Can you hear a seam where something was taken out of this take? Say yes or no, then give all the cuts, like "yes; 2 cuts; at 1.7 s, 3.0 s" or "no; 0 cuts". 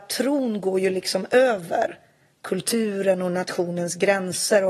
no; 0 cuts